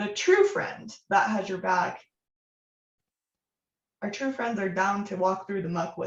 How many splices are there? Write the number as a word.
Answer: zero